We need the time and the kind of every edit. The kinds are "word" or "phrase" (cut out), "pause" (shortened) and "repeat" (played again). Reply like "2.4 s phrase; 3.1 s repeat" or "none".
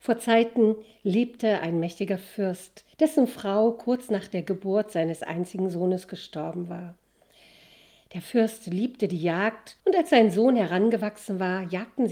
2.9 s pause; 9.8 s pause